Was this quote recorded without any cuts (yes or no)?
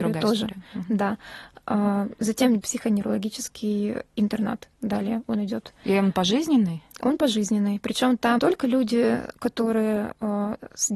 no